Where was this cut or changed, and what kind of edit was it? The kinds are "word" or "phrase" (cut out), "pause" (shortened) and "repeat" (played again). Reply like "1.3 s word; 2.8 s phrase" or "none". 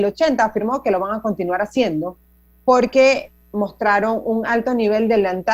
none